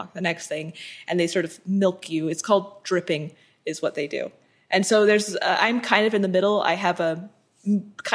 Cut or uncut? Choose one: uncut